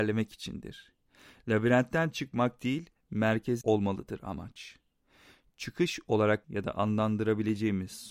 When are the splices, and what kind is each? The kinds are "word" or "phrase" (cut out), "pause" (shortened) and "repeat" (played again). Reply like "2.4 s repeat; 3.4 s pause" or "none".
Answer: 3.6 s word; 6.4 s word